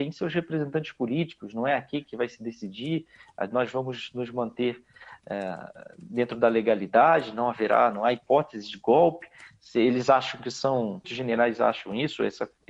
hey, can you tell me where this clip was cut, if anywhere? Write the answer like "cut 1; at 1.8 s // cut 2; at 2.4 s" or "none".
cut 1; at 11.0 s